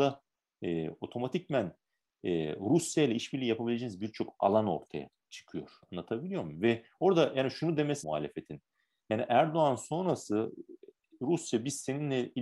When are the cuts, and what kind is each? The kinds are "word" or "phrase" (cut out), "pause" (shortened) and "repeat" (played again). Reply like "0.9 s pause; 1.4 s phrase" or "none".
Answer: 8.0 s word